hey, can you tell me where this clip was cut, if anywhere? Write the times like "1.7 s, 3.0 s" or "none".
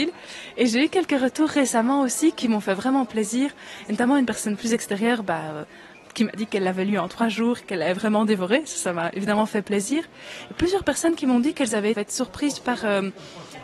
11.9 s